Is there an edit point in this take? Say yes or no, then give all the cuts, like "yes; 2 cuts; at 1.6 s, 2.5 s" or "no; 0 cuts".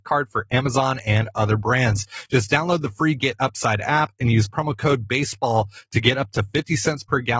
no; 0 cuts